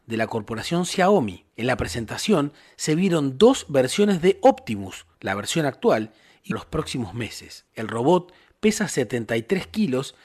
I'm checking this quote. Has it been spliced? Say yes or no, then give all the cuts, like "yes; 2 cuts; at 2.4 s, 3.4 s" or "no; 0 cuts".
yes; 4 cuts; at 1.5 s, 5.1 s, 6.5 s, 7.7 s